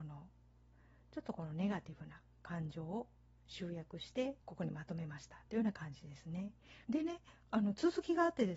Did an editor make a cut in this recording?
yes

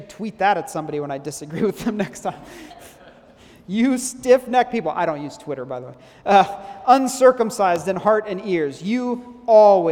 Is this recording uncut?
yes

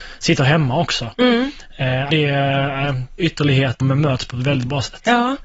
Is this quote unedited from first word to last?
no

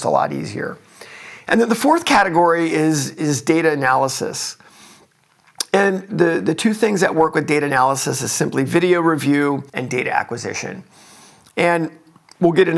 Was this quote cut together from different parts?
yes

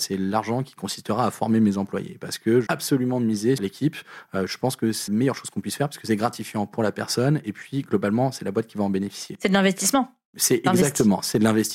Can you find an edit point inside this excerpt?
yes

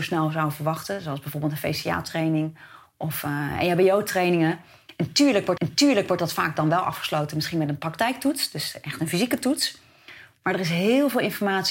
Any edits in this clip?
yes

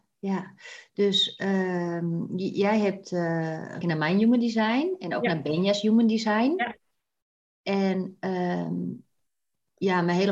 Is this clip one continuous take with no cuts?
no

